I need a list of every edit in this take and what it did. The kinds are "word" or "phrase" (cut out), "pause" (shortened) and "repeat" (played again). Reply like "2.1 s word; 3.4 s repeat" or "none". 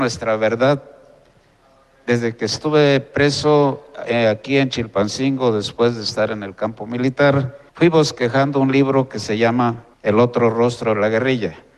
7.7 s pause; 9.9 s pause